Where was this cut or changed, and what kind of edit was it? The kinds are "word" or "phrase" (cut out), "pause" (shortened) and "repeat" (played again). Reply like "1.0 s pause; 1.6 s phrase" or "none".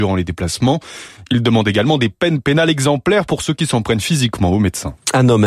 none